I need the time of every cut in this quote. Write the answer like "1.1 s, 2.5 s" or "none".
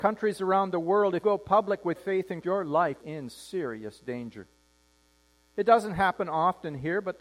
1.2 s, 1.9 s, 2.4 s, 3.0 s